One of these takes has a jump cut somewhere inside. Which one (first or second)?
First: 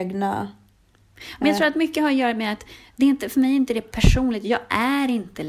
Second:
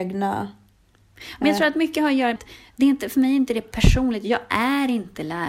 second